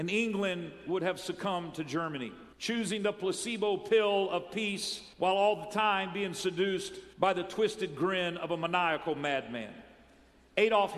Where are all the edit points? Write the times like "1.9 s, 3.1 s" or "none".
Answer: 2.5 s, 5.1 s, 7.1 s